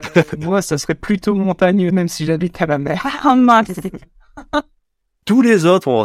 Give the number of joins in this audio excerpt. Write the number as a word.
one